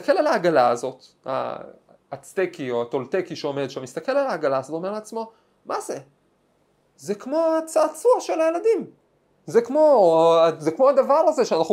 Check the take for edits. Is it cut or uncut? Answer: uncut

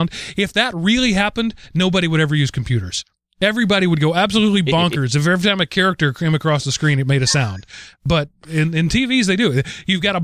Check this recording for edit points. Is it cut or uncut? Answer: uncut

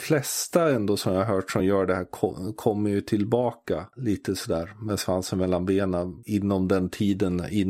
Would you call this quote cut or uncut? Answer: uncut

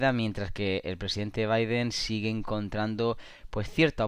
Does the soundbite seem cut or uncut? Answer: uncut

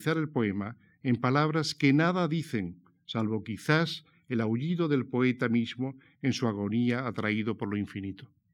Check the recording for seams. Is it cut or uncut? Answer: uncut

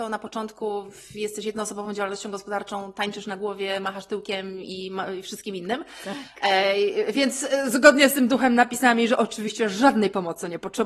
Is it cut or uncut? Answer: uncut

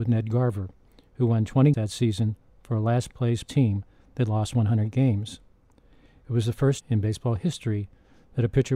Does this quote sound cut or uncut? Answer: cut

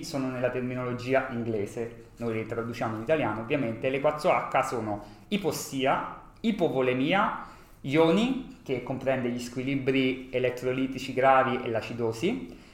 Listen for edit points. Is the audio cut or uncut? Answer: uncut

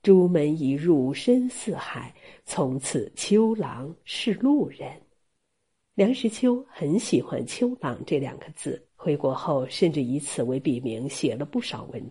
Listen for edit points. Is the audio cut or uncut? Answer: cut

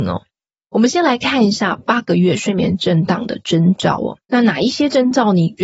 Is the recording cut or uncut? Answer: cut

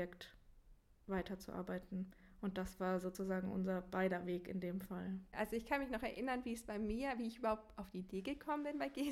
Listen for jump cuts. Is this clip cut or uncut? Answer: uncut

